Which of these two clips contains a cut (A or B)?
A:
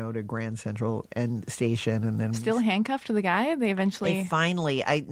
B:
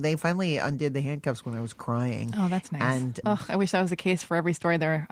B